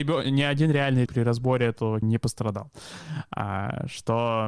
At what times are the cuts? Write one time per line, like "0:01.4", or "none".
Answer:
0:01.1
0:02.0